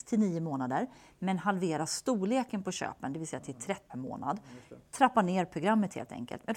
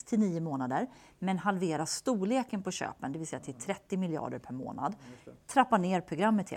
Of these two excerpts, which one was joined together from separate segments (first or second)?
first